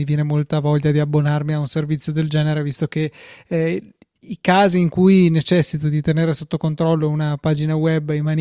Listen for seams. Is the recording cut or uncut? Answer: uncut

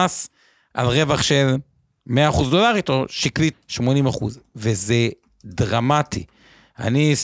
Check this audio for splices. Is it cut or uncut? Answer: cut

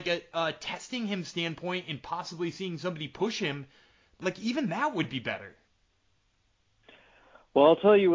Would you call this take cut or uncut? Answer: uncut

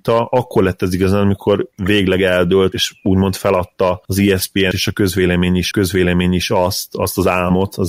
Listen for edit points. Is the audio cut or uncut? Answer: cut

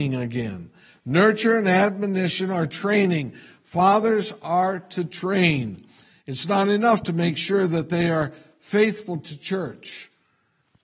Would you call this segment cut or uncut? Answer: uncut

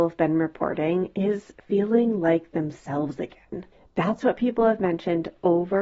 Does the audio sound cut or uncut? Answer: cut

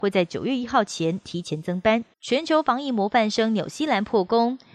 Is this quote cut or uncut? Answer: cut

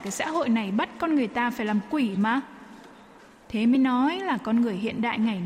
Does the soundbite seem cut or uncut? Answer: uncut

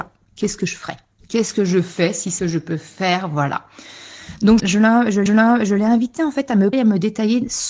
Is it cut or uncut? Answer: cut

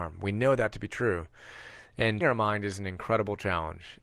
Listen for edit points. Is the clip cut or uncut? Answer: cut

